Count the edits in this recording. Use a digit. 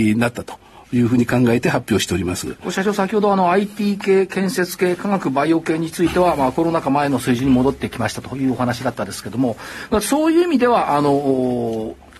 0